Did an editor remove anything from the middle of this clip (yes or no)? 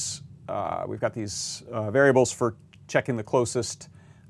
no